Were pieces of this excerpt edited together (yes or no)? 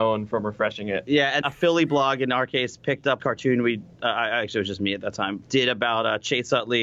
yes